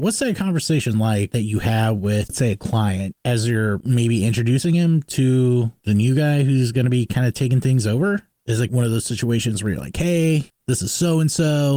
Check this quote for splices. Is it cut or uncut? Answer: uncut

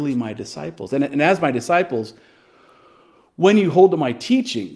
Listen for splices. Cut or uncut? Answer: uncut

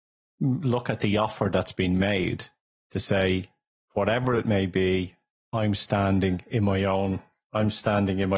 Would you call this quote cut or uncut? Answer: uncut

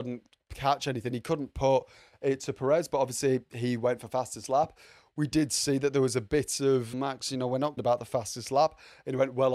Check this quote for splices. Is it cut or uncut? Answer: cut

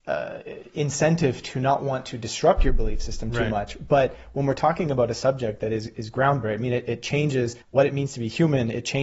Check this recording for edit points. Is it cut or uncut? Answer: cut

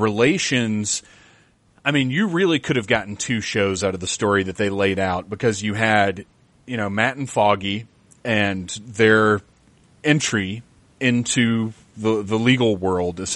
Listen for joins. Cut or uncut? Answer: uncut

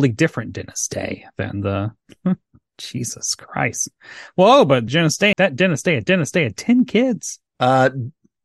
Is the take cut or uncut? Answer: cut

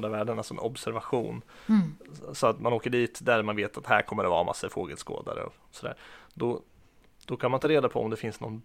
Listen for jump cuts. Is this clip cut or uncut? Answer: uncut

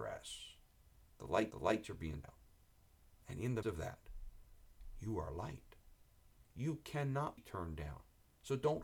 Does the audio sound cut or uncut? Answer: cut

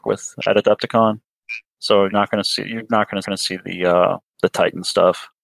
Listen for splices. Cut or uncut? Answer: cut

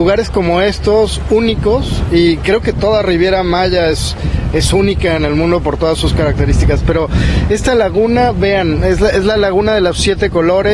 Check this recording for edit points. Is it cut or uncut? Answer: uncut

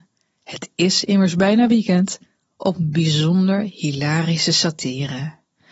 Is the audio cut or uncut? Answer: uncut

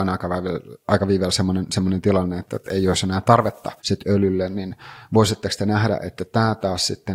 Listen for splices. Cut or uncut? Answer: cut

